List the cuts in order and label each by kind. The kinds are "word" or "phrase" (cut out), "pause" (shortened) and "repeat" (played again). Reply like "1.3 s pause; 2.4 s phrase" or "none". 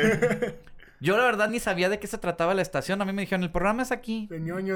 none